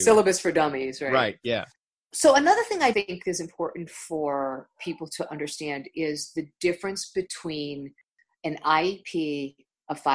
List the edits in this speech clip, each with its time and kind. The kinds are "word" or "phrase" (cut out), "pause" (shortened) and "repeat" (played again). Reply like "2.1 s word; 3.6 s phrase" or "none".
2.9 s word